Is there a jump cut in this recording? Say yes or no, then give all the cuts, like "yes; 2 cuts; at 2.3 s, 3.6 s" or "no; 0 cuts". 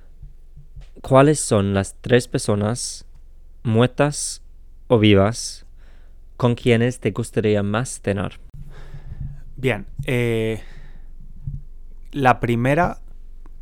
no; 0 cuts